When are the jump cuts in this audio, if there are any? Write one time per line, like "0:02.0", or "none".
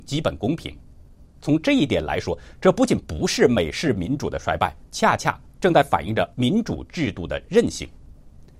0:04.8
0:05.5